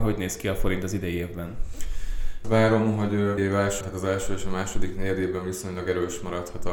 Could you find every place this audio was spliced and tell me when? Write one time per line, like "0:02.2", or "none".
0:02.4
0:03.4
0:03.8